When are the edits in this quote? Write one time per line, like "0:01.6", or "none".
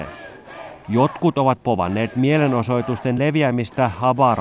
none